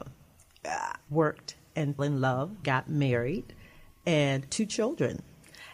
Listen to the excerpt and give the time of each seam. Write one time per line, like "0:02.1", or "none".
0:01.1
0:02.0
0:02.6
0:04.5

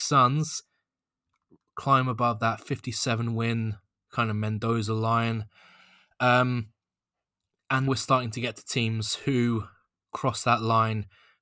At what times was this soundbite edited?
0:07.9

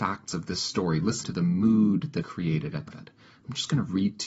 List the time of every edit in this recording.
0:01.2
0:02.2
0:02.9

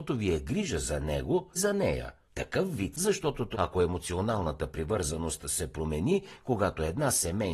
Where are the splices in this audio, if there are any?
0:01.6
0:02.3
0:02.9
0:03.5

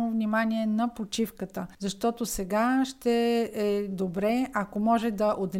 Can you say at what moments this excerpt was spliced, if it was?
0:01.7

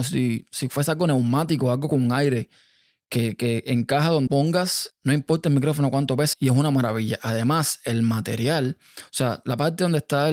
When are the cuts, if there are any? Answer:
0:04.3
0:06.3

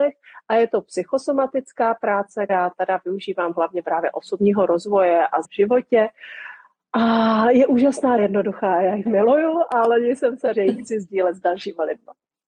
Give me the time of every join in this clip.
0:02.5
0:03.8
0:05.4
0:08.2
0:09.1
0:10.5

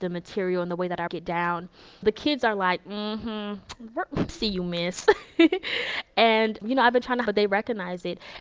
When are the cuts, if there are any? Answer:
0:01.1
0:02.0
0:04.3
0:06.6
0:07.3

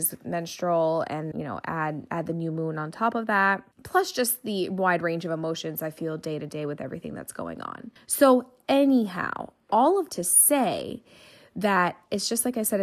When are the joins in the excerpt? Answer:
0:01.3
0:03.7
0:08.0
0:10.1

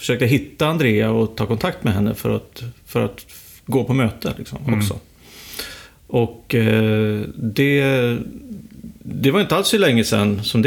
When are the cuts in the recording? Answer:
0:03.5

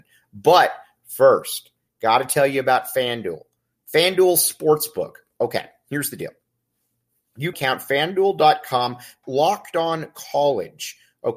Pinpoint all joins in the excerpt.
0:07.5
0:09.2

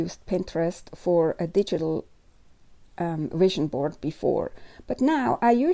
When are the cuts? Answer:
none

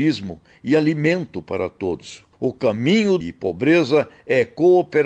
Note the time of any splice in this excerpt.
0:02.3
0:03.2

